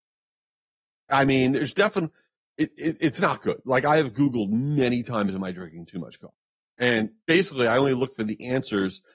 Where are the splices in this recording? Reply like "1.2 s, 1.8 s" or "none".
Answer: 7.2 s